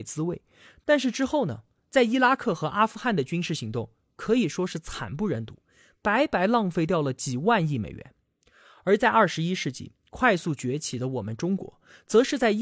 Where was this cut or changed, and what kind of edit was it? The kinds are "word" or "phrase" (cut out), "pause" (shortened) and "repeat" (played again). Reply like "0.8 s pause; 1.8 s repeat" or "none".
none

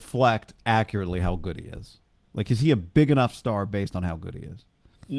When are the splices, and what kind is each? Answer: none

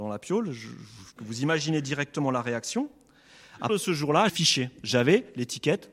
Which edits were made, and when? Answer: 1.2 s word; 3.7 s word; 4.3 s word

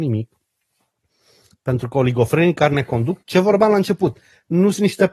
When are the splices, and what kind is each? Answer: 3.2 s word

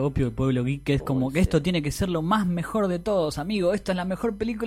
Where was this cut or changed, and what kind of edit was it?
none

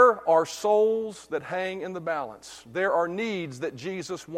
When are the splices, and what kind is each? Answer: none

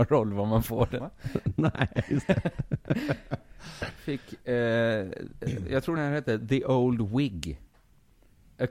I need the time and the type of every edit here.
1.0 s word; 6.0 s word

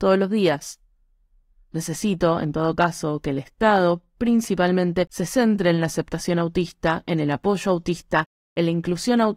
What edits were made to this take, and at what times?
none

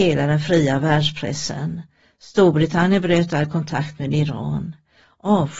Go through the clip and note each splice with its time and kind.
none

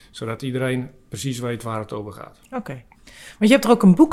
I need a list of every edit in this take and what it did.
2.9 s pause

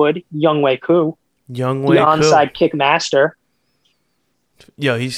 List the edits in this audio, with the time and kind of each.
none

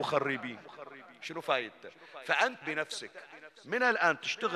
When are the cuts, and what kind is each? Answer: 2.6 s word

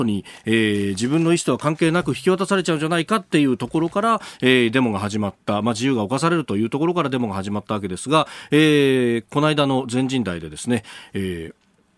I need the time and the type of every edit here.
none

